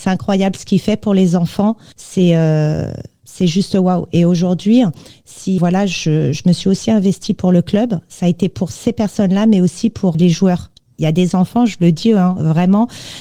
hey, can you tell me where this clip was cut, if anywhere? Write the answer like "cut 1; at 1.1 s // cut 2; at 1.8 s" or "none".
cut 1; at 5.6 s // cut 2; at 10.1 s